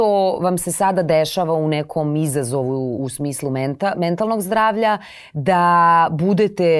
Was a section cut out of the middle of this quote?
yes; 1 cut; at 3.0 s

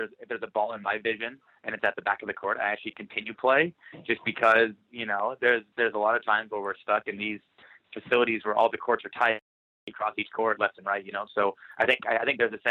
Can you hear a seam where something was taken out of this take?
no; 0 cuts

